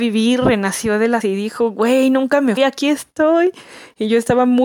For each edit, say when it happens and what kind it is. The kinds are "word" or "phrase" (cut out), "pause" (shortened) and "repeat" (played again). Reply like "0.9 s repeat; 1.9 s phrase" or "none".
1.2 s word; 2.6 s word